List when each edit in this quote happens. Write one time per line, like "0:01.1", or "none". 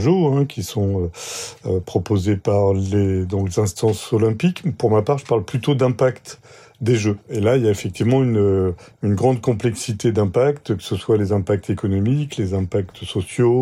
none